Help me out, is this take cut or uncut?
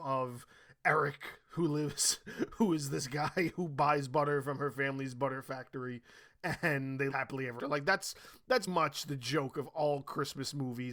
cut